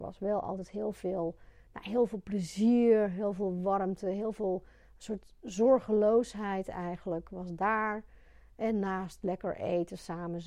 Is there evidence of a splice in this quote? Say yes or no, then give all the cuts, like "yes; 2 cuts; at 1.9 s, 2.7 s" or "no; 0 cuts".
no; 0 cuts